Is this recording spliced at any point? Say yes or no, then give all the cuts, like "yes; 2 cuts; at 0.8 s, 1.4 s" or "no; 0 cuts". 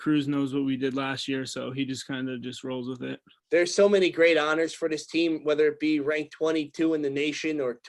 yes; 1 cut; at 3.4 s